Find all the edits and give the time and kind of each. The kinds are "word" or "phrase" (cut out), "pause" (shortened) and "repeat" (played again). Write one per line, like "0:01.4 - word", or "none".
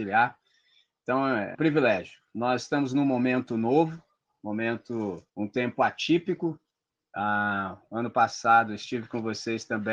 0:01.5 - word
0:05.3 - pause